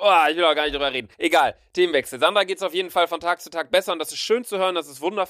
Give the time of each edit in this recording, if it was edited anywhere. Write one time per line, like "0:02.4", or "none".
0:01.1